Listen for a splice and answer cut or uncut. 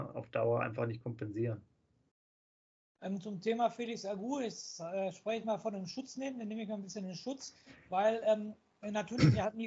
uncut